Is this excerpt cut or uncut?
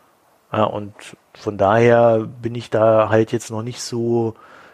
uncut